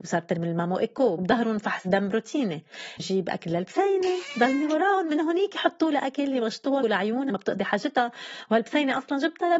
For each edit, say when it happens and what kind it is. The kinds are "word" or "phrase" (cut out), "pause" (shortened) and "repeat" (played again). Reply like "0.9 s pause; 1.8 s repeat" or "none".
3.0 s word; 6.8 s word; 7.3 s phrase